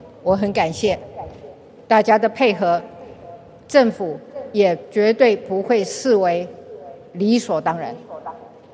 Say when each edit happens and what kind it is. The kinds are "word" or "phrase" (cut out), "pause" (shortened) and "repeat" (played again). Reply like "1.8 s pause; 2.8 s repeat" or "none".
none

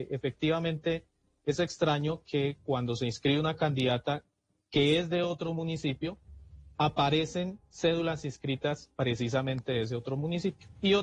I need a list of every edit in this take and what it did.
none

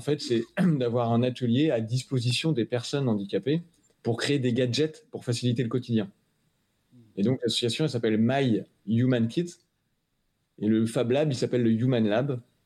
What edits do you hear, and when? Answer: none

